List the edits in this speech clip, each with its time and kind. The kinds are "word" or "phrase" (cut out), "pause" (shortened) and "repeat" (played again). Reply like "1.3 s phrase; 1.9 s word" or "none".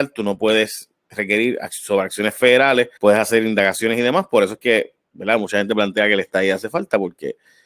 3.0 s pause; 5.0 s pause